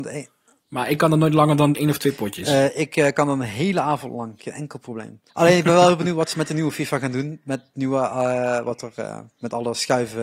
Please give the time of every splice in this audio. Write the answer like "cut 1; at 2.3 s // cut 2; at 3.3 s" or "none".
cut 1; at 5.3 s

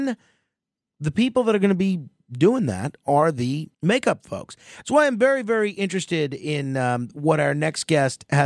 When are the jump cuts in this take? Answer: cut 1; at 3.7 s

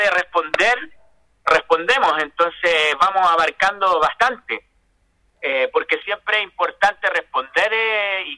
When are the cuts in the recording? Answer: none

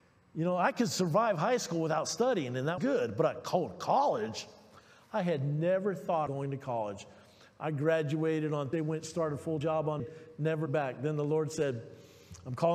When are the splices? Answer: cut 1; at 2.8 s // cut 2; at 6.3 s // cut 3; at 8.7 s // cut 4; at 9.6 s // cut 5; at 10.0 s // cut 6; at 10.7 s

